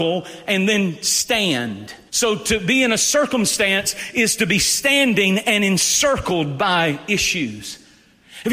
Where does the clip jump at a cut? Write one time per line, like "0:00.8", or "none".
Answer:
0:02.1